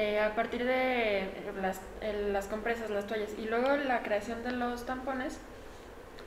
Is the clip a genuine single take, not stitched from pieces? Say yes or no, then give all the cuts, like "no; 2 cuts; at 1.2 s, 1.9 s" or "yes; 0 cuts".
no; 1 cut; at 1.5 s